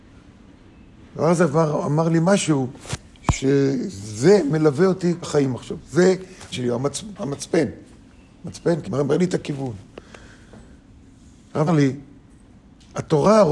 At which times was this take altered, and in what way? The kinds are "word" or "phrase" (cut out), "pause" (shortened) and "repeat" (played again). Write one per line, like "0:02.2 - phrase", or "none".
0:05.2 - word
0:06.5 - word
0:08.8 - word
0:11.7 - word

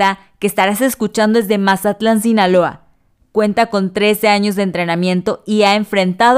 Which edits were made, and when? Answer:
none

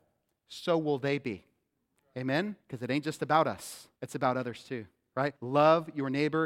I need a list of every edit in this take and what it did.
0:02.6 - pause
0:04.0 - pause
0:05.4 - pause

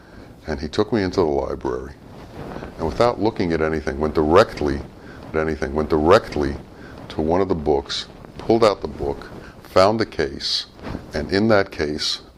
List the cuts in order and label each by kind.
0:05.3 - repeat

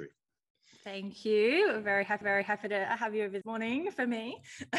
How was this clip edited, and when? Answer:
0:02.2 - repeat
0:03.4 - phrase

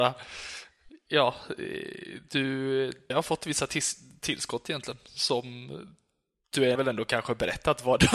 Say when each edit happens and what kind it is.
0:03.1 - word
0:06.8 - word

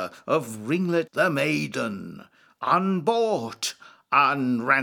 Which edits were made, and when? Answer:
0:01.1 - word

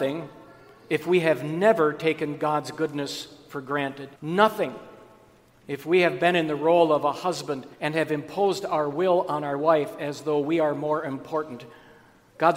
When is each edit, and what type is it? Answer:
0:04.2 - pause
0:07.7 - pause

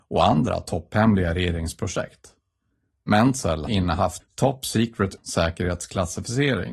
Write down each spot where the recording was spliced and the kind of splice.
0:03.7 - word
0:04.2 - word
0:05.2 - word

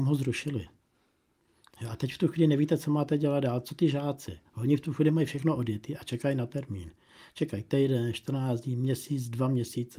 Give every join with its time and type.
none

